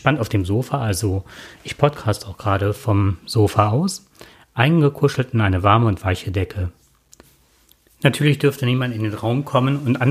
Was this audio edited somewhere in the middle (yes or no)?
no